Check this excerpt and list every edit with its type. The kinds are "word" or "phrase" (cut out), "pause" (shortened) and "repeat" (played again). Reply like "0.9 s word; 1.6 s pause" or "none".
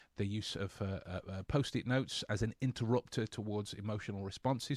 none